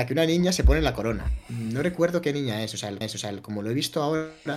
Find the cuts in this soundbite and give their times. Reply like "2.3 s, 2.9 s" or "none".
3.0 s